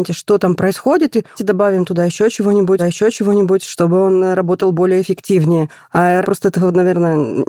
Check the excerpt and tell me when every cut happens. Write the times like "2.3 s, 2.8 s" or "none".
1.4 s, 2.8 s, 6.2 s

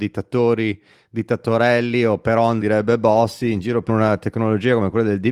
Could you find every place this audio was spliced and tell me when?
2.6 s, 3.9 s

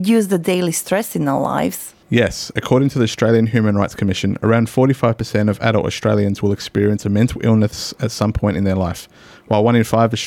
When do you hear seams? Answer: 2.0 s

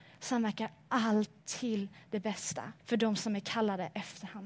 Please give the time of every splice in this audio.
1.4 s, 2.8 s

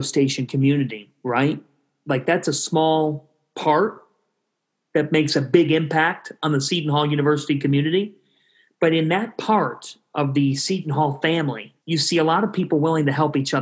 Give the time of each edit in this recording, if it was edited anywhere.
11.8 s

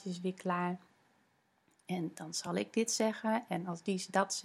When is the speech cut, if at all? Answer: none

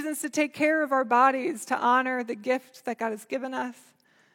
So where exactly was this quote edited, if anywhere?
none

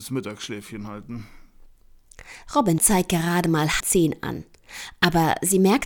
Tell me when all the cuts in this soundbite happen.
2.8 s, 3.8 s

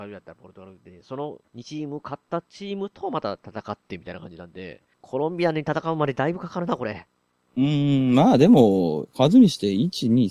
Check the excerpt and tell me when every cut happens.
1.4 s, 4.9 s, 7.3 s

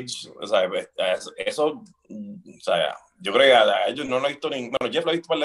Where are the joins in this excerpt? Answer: none

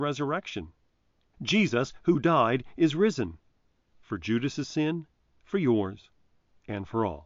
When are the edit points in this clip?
none

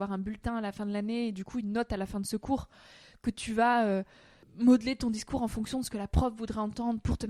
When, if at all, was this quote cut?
none

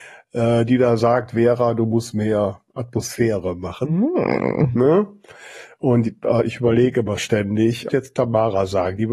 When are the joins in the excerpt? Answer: 7.9 s

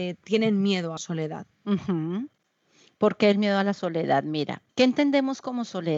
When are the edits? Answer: 1.0 s, 1.5 s, 4.7 s

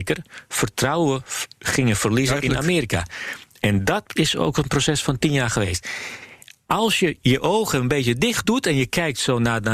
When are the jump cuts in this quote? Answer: none

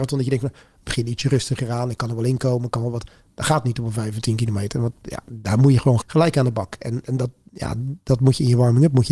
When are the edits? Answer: 6.0 s

